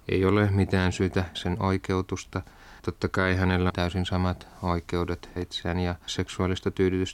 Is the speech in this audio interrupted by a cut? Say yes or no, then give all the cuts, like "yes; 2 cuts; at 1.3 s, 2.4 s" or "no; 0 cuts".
yes; 5 cuts; at 1.3 s, 2.8 s, 3.7 s, 5.4 s, 6.1 s